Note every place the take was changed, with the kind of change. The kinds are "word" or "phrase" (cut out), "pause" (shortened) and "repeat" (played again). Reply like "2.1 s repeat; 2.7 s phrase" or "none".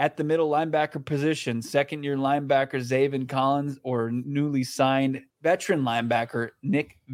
5.3 s pause